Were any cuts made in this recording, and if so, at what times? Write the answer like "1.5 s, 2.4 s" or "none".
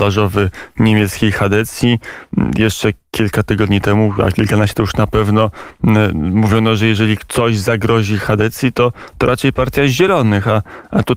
none